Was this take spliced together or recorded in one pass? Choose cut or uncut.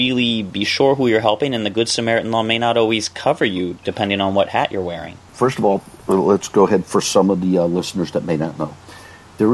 uncut